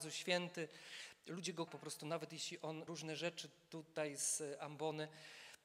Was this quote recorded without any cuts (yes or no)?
no